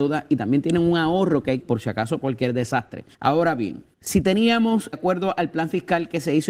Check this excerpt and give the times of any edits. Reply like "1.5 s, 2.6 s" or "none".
1.6 s, 2.2 s, 3.1 s, 3.9 s, 4.9 s